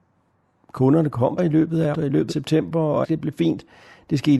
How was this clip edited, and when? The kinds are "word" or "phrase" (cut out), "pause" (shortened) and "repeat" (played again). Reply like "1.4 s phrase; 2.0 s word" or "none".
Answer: 1.4 s word; 1.9 s word; 2.3 s word; 3.0 s word